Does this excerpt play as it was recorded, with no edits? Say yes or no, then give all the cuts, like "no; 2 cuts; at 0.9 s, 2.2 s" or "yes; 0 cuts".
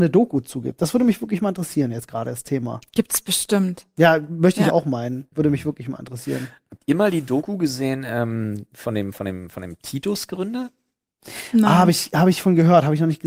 yes; 0 cuts